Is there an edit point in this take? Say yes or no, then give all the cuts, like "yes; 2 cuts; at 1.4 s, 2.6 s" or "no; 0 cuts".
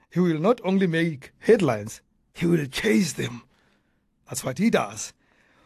no; 0 cuts